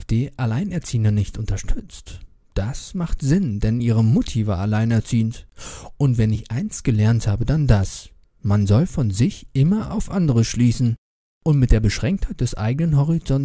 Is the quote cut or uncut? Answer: uncut